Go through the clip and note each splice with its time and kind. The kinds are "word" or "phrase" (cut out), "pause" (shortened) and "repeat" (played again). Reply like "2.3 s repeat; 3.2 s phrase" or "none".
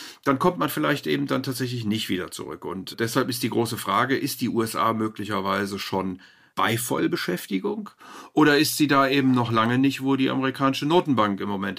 none